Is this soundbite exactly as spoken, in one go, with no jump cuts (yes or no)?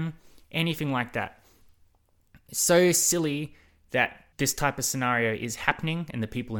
no